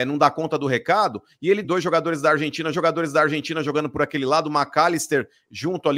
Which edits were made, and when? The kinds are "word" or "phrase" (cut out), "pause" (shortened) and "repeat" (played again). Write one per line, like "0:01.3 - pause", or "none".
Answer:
0:01.6 - phrase
0:02.7 - repeat